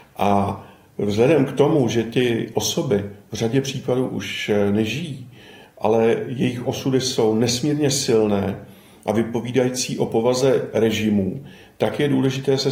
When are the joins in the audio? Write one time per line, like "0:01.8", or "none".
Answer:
none